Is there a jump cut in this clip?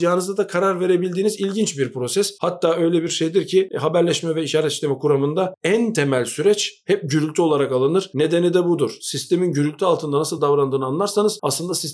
no; 0 cuts

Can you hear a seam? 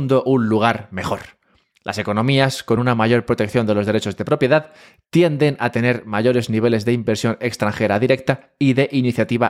no; 0 cuts

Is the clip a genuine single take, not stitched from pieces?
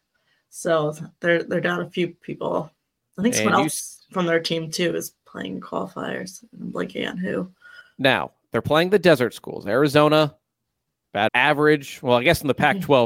no; 3 cuts; at 3.0 s, 7.8 s, 11.3 s

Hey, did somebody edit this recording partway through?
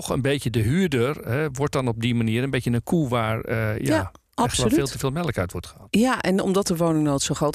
no; 0 cuts

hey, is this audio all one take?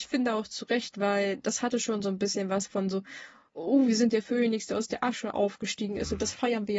yes; 0 cuts

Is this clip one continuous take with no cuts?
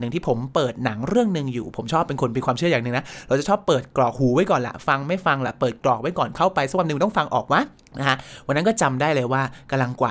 no; 1 cut; at 7.8 s

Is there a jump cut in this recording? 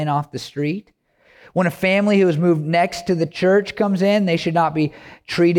no; 0 cuts

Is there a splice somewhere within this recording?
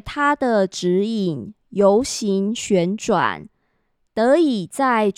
no; 0 cuts

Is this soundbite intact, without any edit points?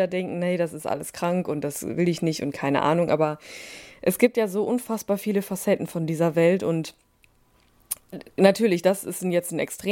yes; 0 cuts

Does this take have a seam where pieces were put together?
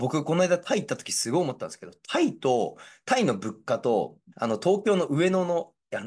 yes; 1 cut; at 4.3 s

